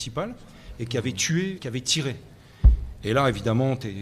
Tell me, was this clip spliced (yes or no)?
yes